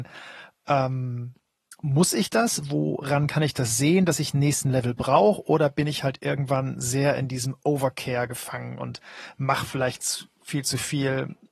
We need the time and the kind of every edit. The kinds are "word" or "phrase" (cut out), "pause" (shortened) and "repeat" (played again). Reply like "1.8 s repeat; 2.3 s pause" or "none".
none